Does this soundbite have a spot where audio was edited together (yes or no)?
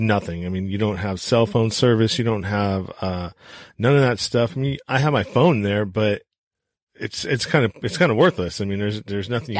no